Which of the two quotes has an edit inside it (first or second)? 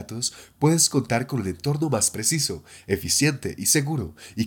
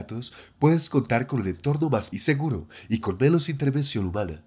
second